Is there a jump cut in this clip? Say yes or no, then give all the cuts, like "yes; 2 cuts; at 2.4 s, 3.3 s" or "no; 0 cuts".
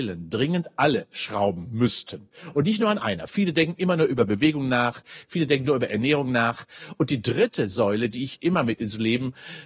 no; 0 cuts